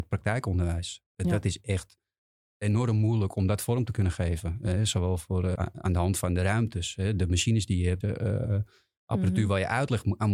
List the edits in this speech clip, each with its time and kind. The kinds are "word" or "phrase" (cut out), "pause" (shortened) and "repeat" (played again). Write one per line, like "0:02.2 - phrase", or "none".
0:05.5 - word
0:08.0 - phrase